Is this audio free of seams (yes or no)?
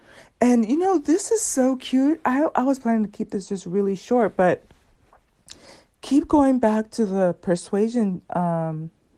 yes